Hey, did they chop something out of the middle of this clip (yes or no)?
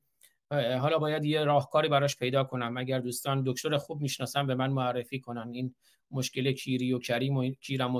no